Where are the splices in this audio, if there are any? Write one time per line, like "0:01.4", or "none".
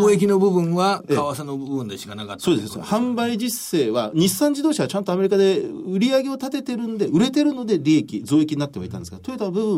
none

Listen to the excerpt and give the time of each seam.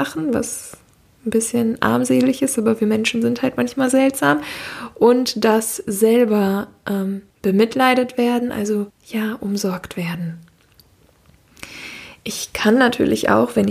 0:07.3
0:08.9

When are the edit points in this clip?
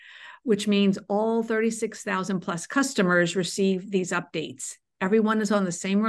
none

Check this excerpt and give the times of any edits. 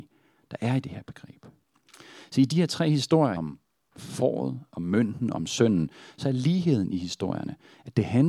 0:03.4

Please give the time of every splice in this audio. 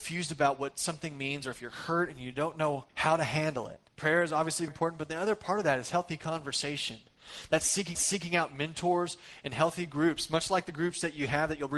0:02.9
0:03.9
0:04.7
0:07.9

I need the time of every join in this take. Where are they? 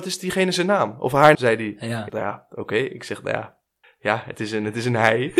0:01.3
0:02.1
0:03.8

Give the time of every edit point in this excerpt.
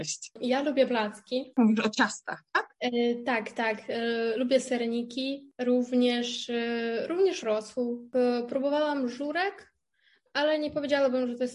none

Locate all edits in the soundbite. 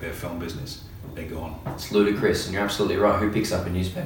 none

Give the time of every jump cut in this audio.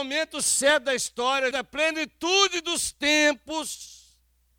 0:01.5

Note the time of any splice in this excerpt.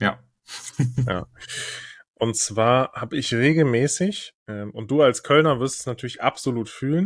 none

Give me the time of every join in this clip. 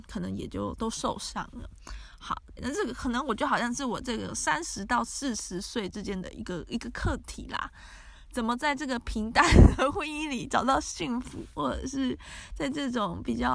0:02.6

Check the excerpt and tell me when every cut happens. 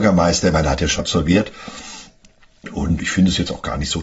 0:01.0
0:03.0

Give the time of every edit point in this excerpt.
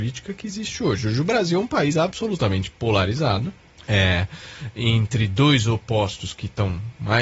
0:03.8

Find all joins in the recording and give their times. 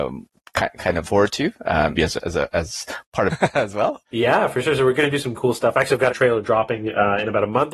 0:01.0
0:01.9
0:03.3
0:04.1
0:06.1

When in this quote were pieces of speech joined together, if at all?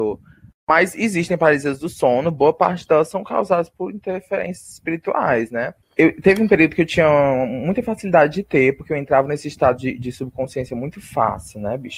none

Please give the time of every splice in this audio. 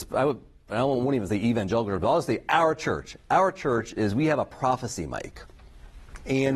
none

